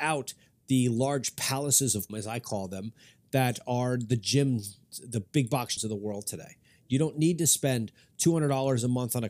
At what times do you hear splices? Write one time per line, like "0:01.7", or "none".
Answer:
0:02.1
0:05.8